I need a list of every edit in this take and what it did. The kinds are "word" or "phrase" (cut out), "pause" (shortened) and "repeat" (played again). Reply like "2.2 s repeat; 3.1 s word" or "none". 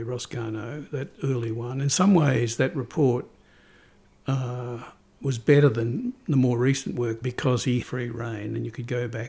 5.0 s pause; 7.2 s phrase; 7.8 s phrase